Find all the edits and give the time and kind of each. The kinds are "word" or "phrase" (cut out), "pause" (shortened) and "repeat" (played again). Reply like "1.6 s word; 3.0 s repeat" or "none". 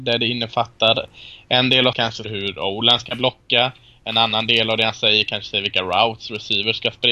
1.9 s word; 2.2 s word